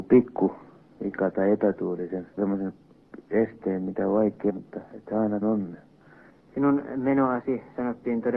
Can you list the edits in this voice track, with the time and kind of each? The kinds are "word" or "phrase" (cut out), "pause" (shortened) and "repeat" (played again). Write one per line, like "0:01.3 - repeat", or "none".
0:02.4 - word
0:04.5 - word
0:05.4 - word